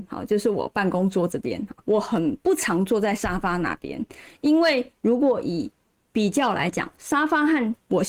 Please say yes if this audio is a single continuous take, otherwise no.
no